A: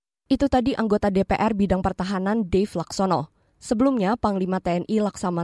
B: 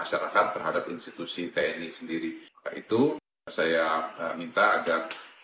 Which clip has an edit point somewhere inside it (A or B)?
B